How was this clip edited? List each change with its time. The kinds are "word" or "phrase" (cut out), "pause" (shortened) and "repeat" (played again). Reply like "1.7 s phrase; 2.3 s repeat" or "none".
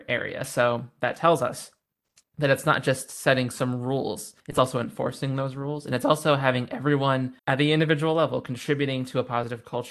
4.4 s pause; 7.4 s pause